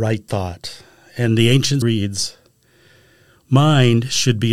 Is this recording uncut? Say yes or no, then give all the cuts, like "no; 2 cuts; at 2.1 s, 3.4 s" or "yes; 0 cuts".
no; 1 cut; at 1.8 s